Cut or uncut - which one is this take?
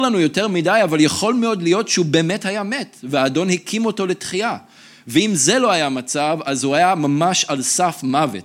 uncut